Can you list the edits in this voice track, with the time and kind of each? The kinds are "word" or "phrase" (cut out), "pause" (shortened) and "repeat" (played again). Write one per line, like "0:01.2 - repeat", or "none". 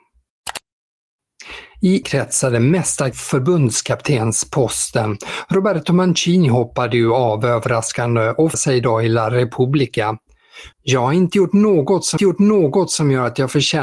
0:02.0 - word
0:03.1 - word
0:08.5 - word
0:10.7 - pause
0:12.2 - repeat